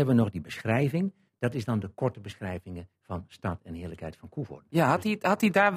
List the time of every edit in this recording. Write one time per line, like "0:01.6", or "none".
none